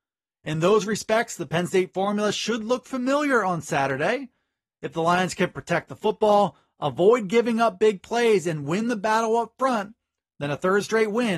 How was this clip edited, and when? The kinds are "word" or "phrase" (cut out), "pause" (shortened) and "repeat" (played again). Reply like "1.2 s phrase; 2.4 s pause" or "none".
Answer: none